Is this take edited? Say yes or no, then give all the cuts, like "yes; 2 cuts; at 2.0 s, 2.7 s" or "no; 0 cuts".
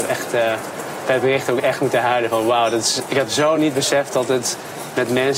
no; 0 cuts